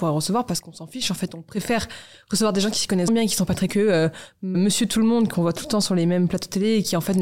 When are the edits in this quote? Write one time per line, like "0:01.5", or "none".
0:03.1
0:03.7
0:04.5

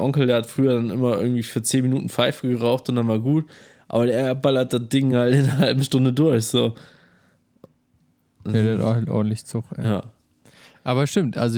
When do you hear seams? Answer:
none

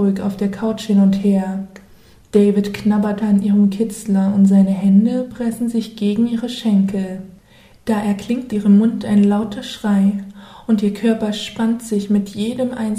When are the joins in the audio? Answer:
0:03.2
0:08.5

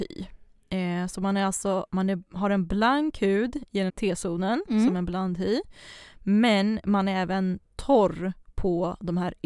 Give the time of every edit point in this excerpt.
0:01.9
0:03.9

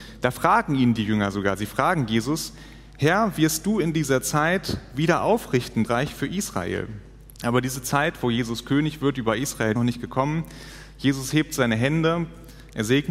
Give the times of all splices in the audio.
0:05.8
0:07.3
0:09.8

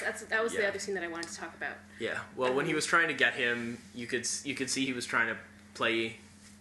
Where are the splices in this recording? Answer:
none

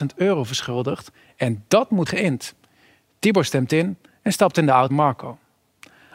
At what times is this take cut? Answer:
0:02.1
0:04.9

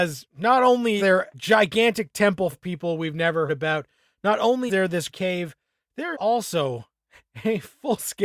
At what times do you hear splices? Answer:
0:01.0
0:01.3
0:02.5
0:03.5
0:04.7
0:05.1
0:06.1

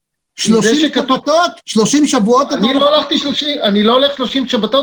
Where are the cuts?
0:01.6

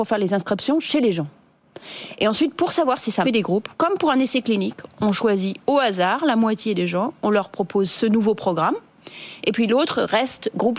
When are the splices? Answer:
0:03.2
0:03.7

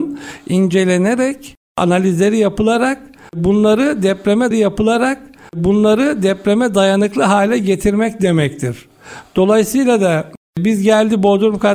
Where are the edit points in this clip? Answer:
0:04.5

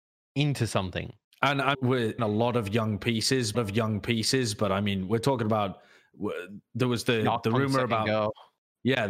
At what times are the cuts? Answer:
0:01.3
0:01.7
0:02.2
0:03.5

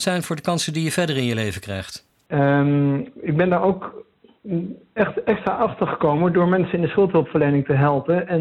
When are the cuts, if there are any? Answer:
none

